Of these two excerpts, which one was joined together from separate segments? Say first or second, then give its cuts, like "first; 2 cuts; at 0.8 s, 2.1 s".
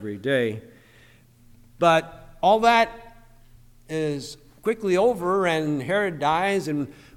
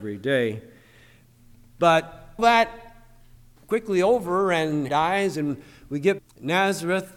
second; 4 cuts; at 2.4 s, 3.6 s, 4.9 s, 6.2 s